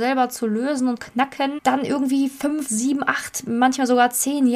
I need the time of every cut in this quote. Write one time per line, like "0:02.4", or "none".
0:01.0
0:01.6
0:02.7